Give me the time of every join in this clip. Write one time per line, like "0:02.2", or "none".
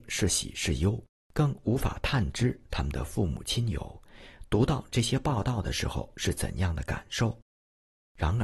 0:01.1